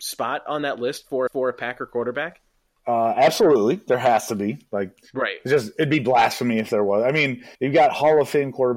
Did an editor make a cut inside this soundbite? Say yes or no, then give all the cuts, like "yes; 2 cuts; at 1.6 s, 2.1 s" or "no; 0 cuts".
yes; 3 cuts; at 1.3 s, 2.7 s, 7.5 s